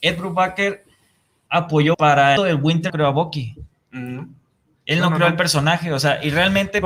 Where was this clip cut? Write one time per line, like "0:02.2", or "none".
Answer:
0:01.5
0:01.9
0:02.4
0:02.9

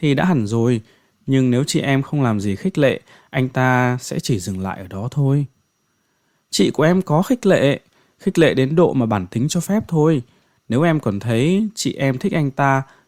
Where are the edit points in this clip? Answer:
none

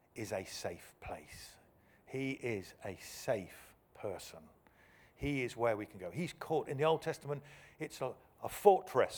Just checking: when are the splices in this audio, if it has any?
none

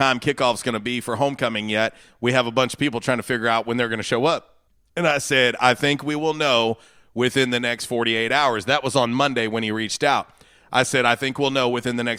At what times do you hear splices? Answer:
0:04.7

